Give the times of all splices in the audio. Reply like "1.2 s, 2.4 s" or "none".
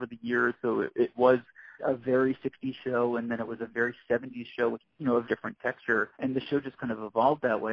1.8 s, 4.8 s, 5.2 s, 6.1 s